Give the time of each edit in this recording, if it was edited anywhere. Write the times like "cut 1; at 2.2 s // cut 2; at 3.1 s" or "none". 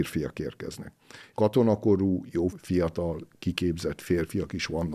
cut 1; at 1.3 s // cut 2; at 2.5 s